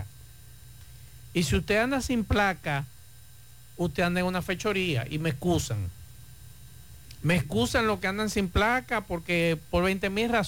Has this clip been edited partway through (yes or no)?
no